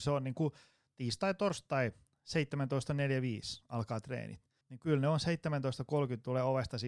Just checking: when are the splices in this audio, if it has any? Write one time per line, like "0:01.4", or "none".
0:04.6